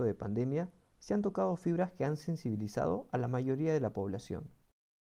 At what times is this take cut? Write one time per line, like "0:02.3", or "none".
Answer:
none